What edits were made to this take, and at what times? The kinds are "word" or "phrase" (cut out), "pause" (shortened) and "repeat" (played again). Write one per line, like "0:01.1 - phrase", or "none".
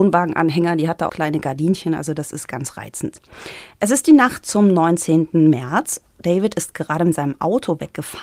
0:01.1 - phrase